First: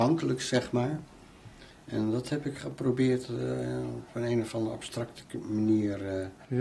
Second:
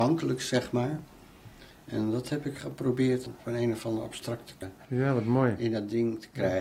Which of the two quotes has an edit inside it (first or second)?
second